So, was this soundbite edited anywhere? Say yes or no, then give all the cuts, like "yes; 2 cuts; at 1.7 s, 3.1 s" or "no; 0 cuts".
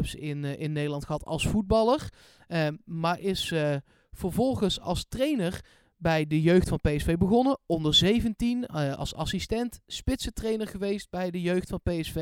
no; 0 cuts